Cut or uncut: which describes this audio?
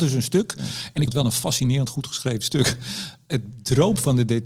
cut